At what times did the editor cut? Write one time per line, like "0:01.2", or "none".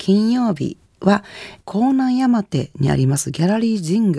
0:01.6